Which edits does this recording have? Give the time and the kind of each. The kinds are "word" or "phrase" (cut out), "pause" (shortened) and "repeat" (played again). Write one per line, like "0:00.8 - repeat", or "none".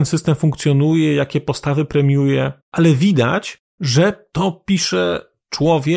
0:02.6 - pause

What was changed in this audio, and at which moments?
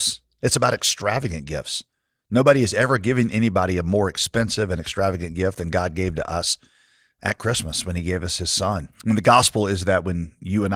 none

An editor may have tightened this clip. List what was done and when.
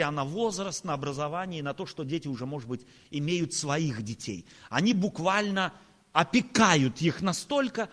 none

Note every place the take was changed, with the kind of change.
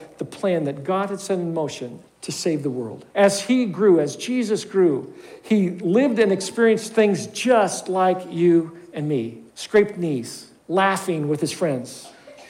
0:02.1 - pause
0:03.1 - pause
0:09.5 - pause
0:10.6 - pause

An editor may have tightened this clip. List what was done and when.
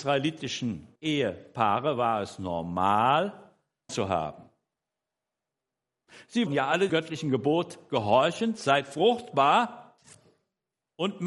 0:01.0 - pause
0:03.9 - word
0:06.5 - word
0:06.9 - word

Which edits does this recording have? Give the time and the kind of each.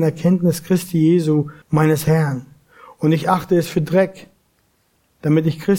0:01.6 - pause

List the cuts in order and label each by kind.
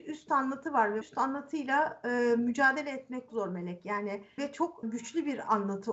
0:01.0 - word
0:03.3 - word
0:04.4 - word
0:04.8 - word

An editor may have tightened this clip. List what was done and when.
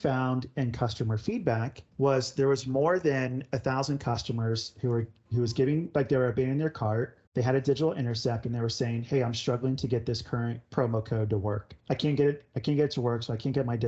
0:01.9 - pause
0:07.3 - pause
0:11.8 - pause

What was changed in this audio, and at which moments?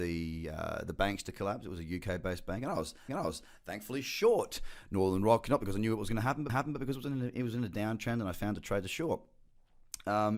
0:03.1 - repeat
0:06.5 - repeat

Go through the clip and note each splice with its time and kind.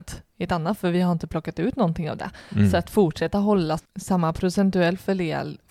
0:03.8 - word

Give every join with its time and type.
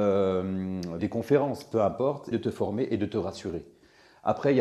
0:01.0 - word
0:02.3 - word

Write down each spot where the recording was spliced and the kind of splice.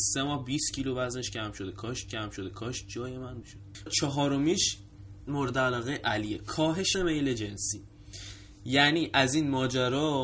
0:02.1 - repeat
0:03.4 - phrase
0:03.9 - word
0:06.9 - word

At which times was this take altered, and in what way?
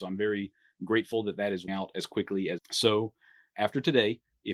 0:01.7 - word
0:02.6 - phrase

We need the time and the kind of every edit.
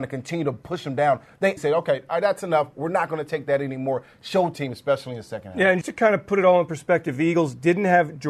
0:01.6 - word
0:04.5 - phrase
0:05.8 - word

